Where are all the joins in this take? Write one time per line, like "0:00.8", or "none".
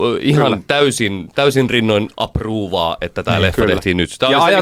0:02.1